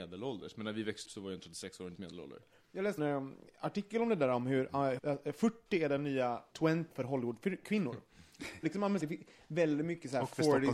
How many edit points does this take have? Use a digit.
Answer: 8